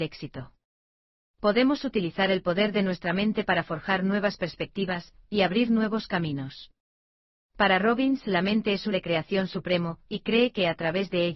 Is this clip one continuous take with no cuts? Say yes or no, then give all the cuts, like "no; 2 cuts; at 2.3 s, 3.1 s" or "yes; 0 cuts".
no; 1 cut; at 8.9 s